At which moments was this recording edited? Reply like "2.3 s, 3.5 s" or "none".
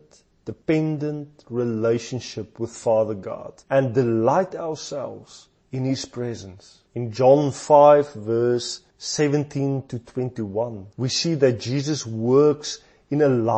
3.6 s, 6.9 s, 10.9 s